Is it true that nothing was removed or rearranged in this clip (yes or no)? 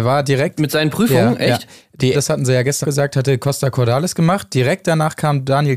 no